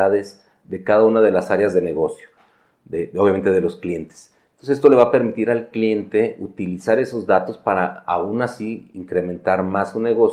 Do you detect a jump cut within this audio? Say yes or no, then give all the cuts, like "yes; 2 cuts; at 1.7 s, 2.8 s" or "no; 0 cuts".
no; 0 cuts